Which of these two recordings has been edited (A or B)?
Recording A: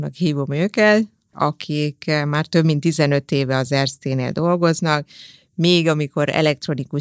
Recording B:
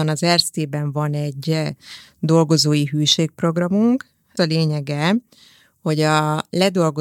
B